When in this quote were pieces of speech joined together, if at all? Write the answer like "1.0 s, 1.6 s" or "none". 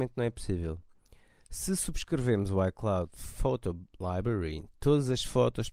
none